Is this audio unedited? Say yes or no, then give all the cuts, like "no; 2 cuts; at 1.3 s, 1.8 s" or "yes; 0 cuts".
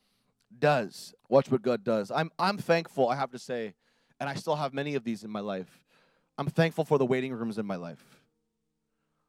no; 1 cut; at 1.2 s